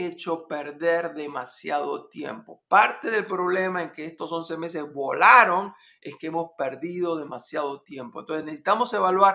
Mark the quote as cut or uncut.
uncut